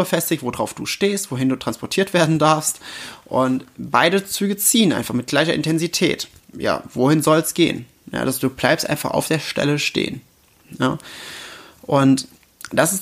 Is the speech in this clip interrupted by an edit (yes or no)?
no